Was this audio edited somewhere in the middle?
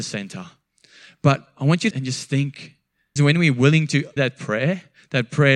yes; 3 cuts; at 1.9 s, 3.2 s, 4.2 s

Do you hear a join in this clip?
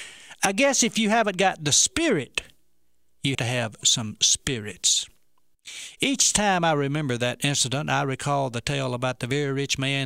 yes; 1 cut; at 3.3 s

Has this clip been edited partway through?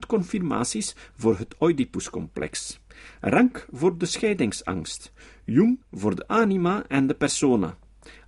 yes; 1 cut; at 5.8 s

